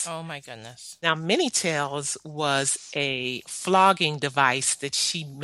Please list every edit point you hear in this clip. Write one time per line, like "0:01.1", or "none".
none